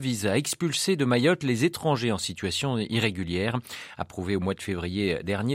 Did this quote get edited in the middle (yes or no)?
no